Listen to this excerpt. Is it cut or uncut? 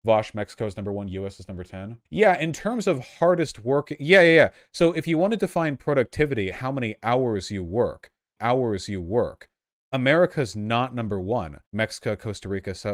cut